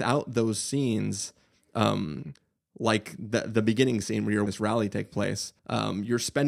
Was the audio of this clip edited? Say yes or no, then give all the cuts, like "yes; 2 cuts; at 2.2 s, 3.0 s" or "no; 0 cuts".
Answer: yes; 2 cuts; at 4.5 s, 5.6 s